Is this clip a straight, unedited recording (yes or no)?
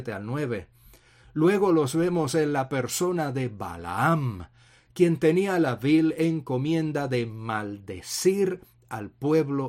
yes